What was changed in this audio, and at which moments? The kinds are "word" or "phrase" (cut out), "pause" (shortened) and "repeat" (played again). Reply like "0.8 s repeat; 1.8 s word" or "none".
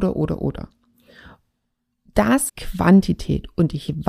2.5 s word